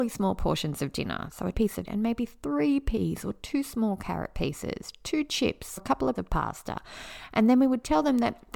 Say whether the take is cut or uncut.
cut